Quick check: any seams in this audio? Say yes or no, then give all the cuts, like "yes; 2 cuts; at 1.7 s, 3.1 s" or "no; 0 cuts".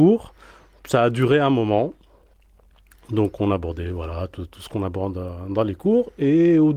no; 0 cuts